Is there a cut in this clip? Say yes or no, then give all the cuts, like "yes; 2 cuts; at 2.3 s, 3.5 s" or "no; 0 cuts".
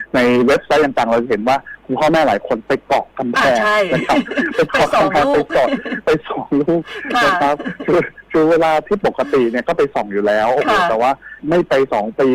yes; 1 cut; at 11.4 s